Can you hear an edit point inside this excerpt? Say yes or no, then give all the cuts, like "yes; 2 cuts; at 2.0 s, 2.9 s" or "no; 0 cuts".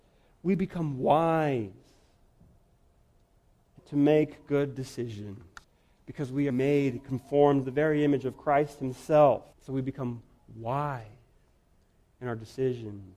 yes; 5 cuts; at 3.8 s, 5.6 s, 6.5 s, 7.6 s, 9.5 s